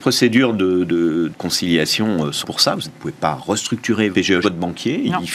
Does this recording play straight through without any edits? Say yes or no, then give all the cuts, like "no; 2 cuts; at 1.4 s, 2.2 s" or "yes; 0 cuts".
no; 5 cuts; at 1.3 s, 2.4 s, 2.8 s, 4.1 s, 4.4 s